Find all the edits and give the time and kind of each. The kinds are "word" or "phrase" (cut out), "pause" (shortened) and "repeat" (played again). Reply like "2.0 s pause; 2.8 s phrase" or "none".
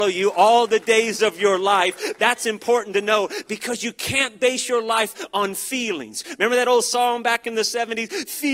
none